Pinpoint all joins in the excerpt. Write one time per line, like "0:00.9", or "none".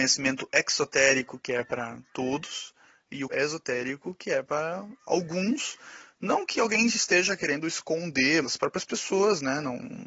0:03.3
0:08.4